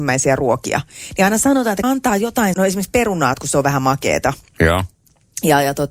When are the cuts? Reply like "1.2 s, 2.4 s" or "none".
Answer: 1.8 s, 2.5 s, 3.3 s